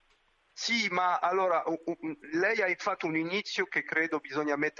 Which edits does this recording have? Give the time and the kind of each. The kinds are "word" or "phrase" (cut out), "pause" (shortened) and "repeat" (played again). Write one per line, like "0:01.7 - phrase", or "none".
none